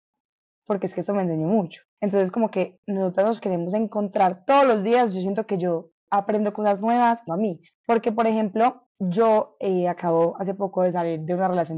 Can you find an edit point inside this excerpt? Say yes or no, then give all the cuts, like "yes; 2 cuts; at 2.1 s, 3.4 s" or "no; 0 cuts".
yes; 5 cuts; at 1.9 s, 6.0 s, 7.3 s, 7.7 s, 8.9 s